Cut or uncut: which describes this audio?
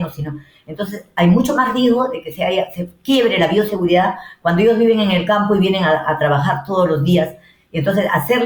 uncut